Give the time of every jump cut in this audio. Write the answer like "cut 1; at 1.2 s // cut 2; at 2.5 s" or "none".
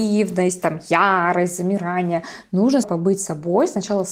cut 1; at 2.8 s